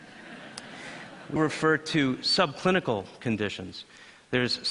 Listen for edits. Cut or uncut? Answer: cut